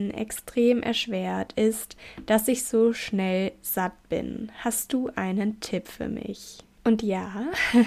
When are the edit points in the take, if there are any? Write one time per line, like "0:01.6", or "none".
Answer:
none